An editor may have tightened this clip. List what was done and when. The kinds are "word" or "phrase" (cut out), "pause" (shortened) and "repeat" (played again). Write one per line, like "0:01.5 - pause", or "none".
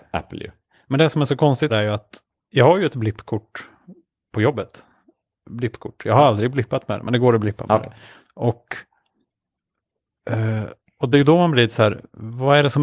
0:01.7 - word
0:11.1 - word